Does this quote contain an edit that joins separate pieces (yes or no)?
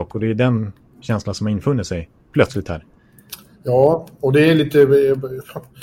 no